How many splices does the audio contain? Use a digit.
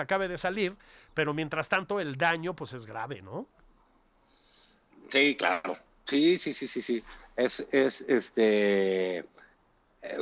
0